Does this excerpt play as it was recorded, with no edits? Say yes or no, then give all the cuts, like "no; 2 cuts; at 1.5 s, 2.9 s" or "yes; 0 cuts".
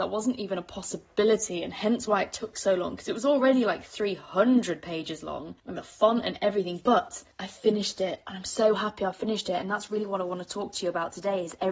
no; 2 cuts; at 5.6 s, 7.3 s